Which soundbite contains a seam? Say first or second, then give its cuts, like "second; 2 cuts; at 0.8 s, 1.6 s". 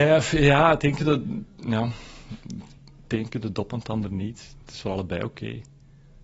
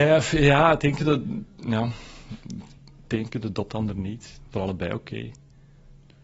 second; 2 cuts; at 3.7 s, 4.5 s